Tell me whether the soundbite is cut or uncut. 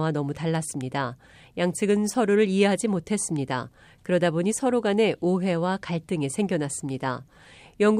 uncut